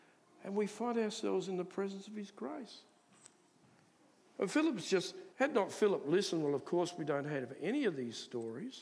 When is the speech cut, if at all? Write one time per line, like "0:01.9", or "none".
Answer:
0:03.6
0:05.3